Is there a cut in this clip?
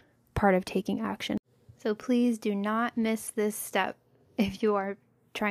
no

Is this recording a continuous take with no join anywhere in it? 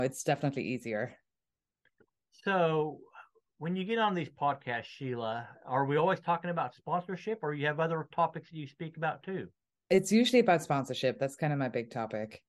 yes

